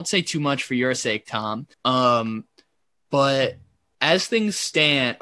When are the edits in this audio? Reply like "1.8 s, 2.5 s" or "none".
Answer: 1.7 s